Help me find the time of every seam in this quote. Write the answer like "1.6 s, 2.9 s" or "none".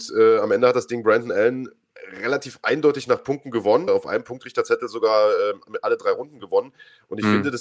3.9 s